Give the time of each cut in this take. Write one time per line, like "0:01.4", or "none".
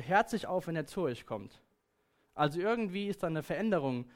none